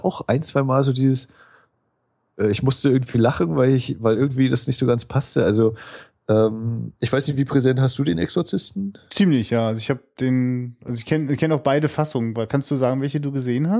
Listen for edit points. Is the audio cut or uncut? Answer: uncut